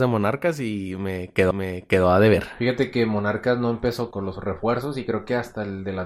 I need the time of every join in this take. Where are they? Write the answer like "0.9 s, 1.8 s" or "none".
1.5 s, 4.1 s